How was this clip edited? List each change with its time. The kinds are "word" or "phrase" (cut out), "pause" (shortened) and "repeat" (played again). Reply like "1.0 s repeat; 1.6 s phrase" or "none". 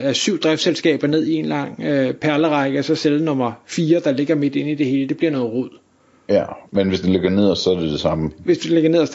none